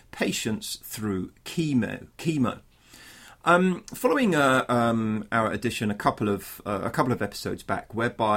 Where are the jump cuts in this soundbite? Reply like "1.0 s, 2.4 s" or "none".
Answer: none